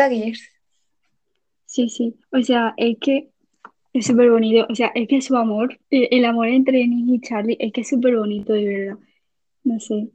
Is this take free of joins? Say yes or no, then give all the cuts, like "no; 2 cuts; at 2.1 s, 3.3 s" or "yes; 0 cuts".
no; 2 cuts; at 2.2 s, 5.8 s